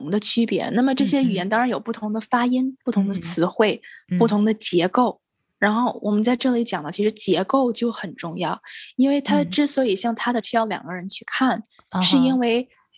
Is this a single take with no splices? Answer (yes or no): no